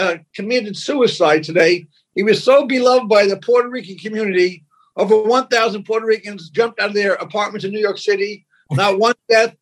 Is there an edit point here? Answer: no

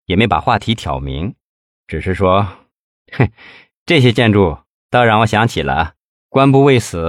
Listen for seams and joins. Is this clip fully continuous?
yes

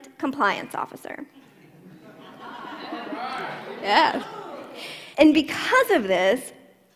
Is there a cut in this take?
yes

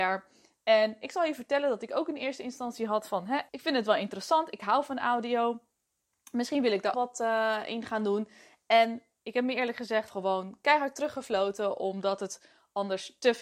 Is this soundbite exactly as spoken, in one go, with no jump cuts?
no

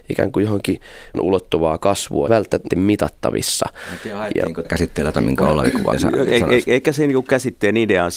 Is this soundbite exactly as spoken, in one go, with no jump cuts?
no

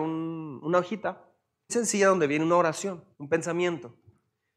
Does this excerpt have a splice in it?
yes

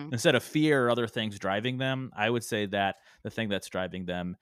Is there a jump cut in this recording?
no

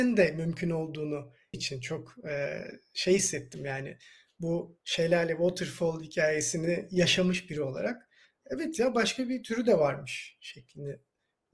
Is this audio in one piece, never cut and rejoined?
no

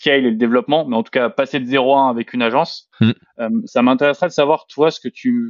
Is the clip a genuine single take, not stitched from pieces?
no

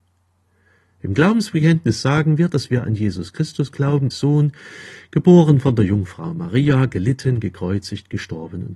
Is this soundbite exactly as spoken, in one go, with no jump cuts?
no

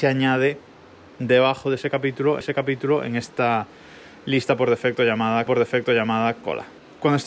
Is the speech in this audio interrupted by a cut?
yes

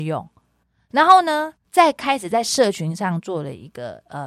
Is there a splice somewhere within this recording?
yes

